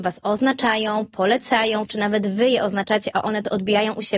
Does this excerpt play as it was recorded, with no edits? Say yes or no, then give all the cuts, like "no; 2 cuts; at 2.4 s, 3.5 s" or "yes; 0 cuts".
yes; 0 cuts